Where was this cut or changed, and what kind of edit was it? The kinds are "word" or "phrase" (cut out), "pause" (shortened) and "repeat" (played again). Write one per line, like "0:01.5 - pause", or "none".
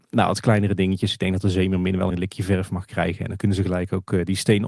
0:02.1 - phrase